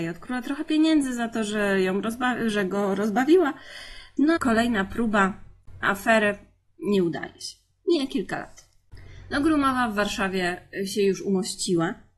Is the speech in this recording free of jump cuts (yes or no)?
no